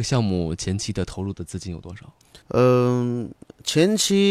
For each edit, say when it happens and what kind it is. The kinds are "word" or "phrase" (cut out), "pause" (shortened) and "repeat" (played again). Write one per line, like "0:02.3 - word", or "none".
0:02.4 - pause